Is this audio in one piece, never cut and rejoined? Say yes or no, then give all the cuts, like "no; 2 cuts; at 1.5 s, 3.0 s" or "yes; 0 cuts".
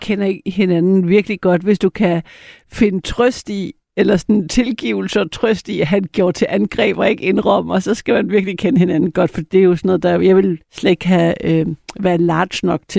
no; 1 cut; at 10.6 s